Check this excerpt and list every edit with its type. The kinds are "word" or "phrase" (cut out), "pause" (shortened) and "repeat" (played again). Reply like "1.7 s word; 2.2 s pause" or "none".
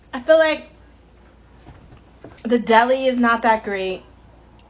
2.4 s pause